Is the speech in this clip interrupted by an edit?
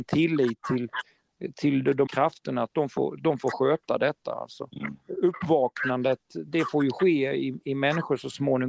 yes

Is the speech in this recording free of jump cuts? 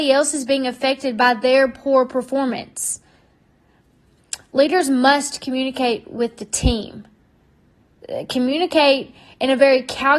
yes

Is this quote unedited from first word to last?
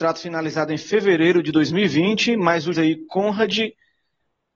no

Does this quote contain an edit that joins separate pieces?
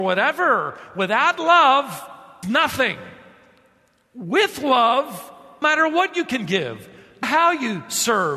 yes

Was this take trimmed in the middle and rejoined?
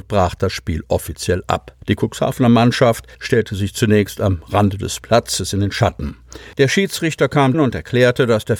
yes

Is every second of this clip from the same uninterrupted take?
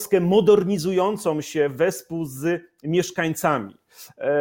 yes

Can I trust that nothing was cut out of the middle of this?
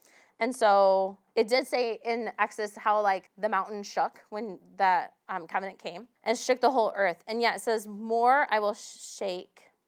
no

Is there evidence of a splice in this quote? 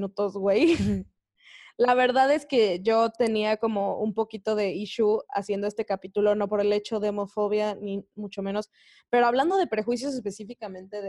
no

